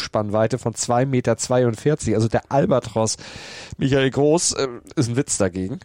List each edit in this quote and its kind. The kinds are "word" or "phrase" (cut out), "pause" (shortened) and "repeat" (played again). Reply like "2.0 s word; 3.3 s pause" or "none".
none

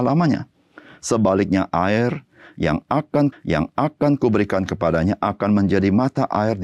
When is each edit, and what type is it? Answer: 3.3 s repeat

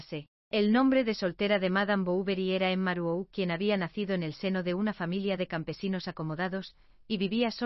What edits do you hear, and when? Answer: none

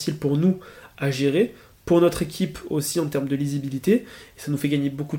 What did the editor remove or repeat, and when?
none

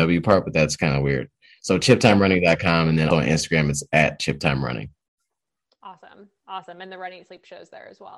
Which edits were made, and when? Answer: 3.1 s word

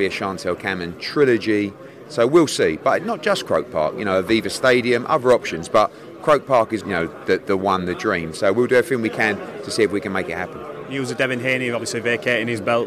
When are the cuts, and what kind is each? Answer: 6.8 s word

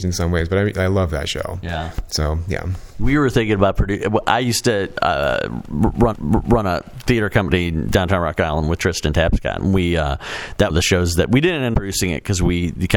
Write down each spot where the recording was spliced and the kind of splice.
6.1 s repeat; 10.7 s phrase; 11.7 s phrase

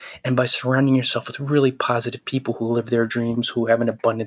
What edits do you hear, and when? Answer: none

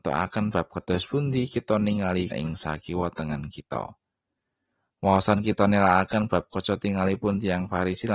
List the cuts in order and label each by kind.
2.3 s word

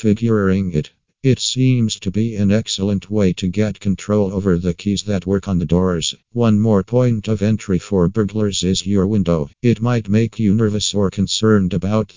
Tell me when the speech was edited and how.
6.2 s pause; 9.5 s pause

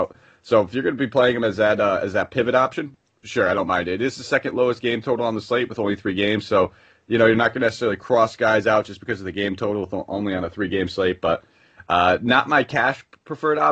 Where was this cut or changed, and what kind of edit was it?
none

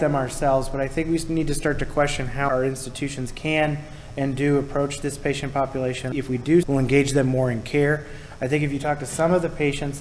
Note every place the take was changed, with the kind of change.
6.6 s word

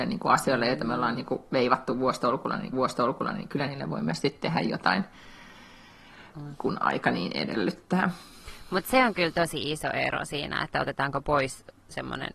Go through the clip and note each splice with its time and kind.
2.7 s repeat

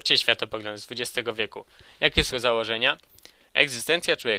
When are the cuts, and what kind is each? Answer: 2.3 s word

